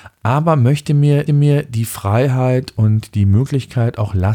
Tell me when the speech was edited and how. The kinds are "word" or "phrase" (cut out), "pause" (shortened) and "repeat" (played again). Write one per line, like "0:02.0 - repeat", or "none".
0:01.3 - repeat

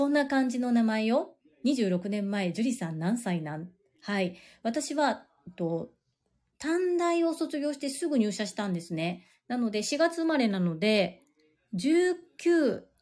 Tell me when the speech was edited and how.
none

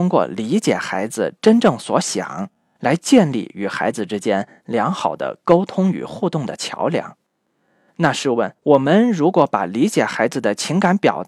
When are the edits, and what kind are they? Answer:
0:08.6 - pause

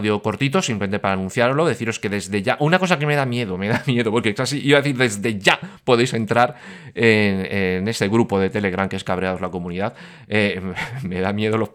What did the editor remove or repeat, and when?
none

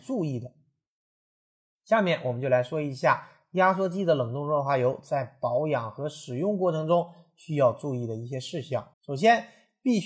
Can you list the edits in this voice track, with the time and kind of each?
0:08.9 - pause

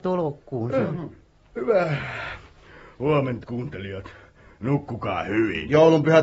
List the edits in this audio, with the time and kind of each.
0:03.4 - word

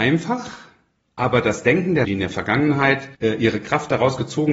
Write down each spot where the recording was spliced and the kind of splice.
0:02.0 - word
0:03.1 - pause

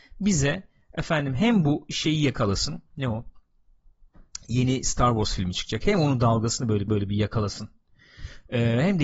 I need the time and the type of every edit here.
0:02.9 - pause
0:06.9 - repeat

